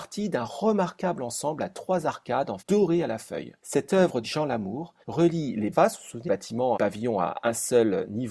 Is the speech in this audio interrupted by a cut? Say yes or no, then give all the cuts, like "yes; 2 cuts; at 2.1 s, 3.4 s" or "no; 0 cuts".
yes; 7 cuts; at 2.6 s, 3.6 s, 4.2 s, 5.0 s, 5.7 s, 6.2 s, 6.7 s